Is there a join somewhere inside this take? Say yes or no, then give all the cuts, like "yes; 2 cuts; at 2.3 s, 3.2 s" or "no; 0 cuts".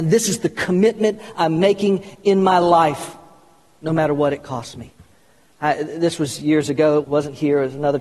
yes; 1 cut; at 7.0 s